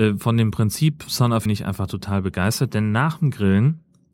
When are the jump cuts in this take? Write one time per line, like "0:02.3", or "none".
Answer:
0:01.5